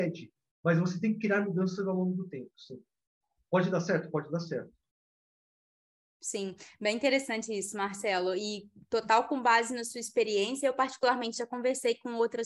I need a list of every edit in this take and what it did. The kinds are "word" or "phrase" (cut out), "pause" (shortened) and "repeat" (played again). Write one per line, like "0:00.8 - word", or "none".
none